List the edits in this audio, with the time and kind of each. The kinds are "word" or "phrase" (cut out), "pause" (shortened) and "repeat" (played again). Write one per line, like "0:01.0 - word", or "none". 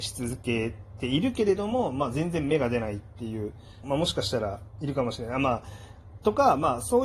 0:03.8 - phrase